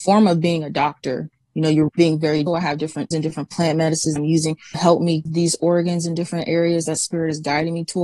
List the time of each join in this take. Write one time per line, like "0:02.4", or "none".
0:01.9
0:02.5
0:03.1
0:04.2
0:04.7
0:05.3